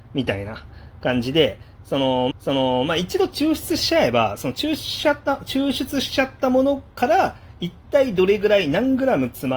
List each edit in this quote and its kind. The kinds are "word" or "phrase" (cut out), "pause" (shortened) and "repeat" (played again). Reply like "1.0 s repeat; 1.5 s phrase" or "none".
2.3 s repeat